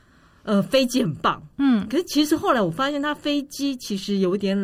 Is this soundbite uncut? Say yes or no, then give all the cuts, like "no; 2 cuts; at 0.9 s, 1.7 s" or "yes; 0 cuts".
yes; 0 cuts